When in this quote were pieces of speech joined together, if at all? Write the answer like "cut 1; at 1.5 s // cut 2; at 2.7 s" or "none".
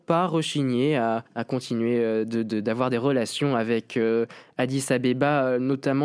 cut 1; at 1.3 s